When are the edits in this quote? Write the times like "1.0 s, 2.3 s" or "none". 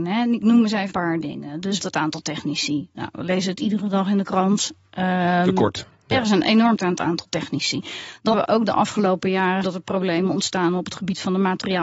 0.9 s, 1.8 s, 6.8 s, 8.3 s, 9.6 s